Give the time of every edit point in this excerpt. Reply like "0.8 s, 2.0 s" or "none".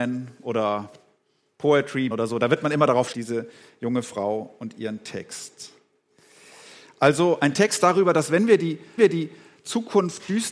2.1 s, 3.1 s, 9.0 s